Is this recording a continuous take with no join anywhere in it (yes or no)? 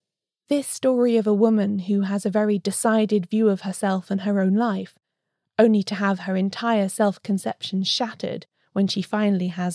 yes